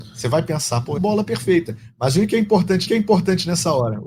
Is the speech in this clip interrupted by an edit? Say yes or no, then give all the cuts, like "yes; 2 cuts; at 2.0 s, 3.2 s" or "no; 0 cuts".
yes; 2 cuts; at 1.0 s, 2.9 s